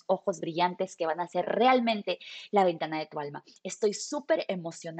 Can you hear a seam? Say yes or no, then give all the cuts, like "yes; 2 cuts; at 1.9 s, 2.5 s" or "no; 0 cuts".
no; 0 cuts